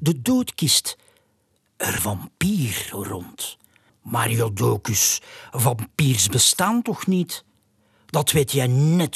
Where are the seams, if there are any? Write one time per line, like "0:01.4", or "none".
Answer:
0:02.0
0:03.9